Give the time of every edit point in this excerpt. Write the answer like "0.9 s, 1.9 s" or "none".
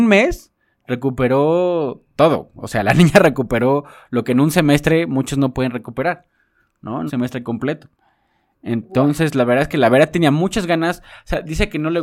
7.1 s